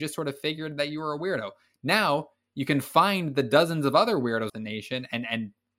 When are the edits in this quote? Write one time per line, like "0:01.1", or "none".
0:04.5